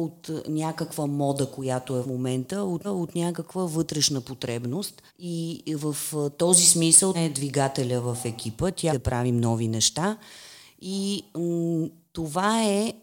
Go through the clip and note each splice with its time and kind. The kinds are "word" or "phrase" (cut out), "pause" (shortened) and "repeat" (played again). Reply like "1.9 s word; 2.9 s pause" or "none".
2.0 s word; 2.8 s repeat; 5.1 s pause; 7.1 s word; 8.9 s phrase